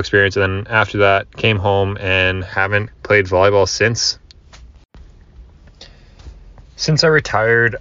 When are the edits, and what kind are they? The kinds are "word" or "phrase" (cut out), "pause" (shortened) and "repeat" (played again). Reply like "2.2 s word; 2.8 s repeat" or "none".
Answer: 2.9 s word